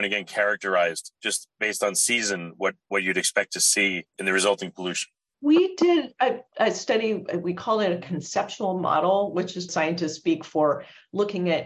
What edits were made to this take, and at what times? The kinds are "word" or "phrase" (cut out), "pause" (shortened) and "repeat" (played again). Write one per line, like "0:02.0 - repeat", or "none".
0:09.7 - word